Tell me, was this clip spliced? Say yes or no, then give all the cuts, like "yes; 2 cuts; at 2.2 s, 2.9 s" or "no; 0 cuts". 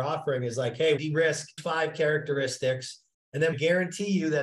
yes; 3 cuts; at 1.0 s, 1.6 s, 3.5 s